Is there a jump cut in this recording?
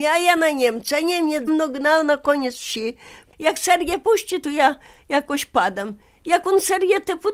yes; 1 cut; at 1.5 s

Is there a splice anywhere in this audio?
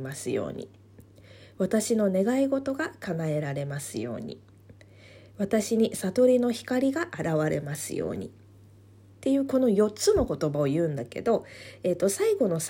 no; 0 cuts

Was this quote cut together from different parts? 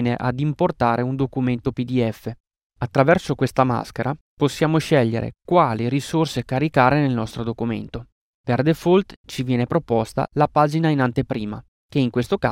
no; 0 cuts

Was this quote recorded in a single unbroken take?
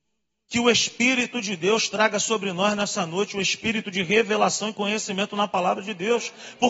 yes; 0 cuts

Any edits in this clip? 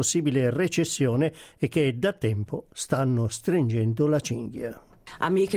no; 0 cuts

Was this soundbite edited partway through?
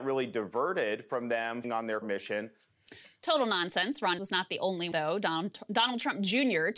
yes; 4 cuts; at 1.6 s, 2.0 s, 4.2 s, 4.9 s

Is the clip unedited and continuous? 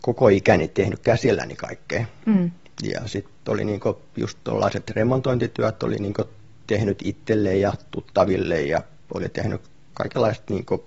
yes; 0 cuts

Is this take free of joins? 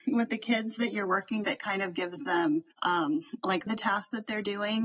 no; 3 cuts; at 1.4 s, 2.7 s, 3.7 s

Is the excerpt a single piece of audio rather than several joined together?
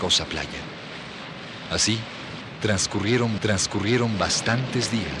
no; 1 cut; at 3.4 s

